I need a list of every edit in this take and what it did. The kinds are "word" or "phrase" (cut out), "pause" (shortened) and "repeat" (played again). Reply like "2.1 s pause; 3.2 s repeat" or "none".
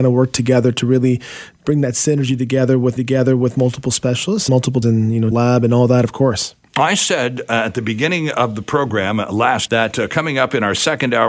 3.0 s repeat; 4.5 s word; 4.8 s word; 5.3 s word; 9.7 s word